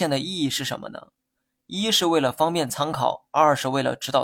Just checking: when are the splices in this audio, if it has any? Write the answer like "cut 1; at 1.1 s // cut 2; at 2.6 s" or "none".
none